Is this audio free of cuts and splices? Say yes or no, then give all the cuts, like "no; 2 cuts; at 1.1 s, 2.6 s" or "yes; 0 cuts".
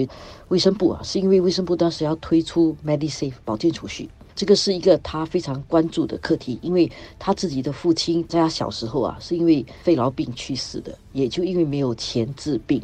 yes; 0 cuts